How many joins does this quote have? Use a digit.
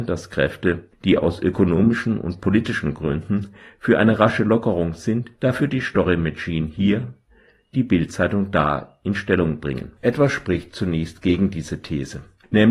2